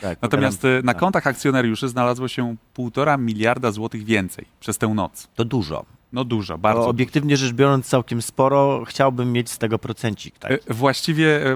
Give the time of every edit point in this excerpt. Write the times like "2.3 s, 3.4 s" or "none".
none